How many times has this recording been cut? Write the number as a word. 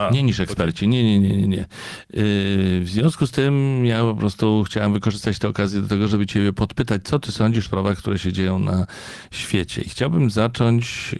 one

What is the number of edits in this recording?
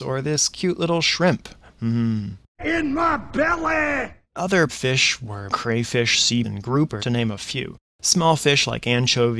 five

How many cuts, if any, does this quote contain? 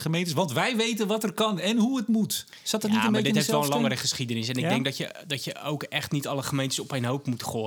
zero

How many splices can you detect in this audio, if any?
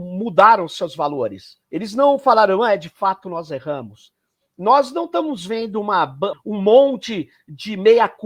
two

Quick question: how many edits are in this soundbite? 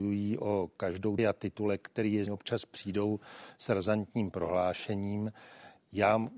two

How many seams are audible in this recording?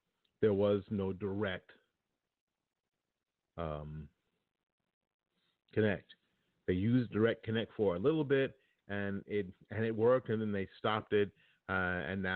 zero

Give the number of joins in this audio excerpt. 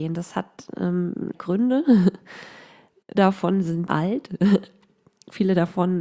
three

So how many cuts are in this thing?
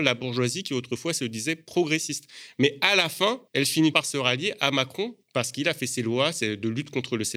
three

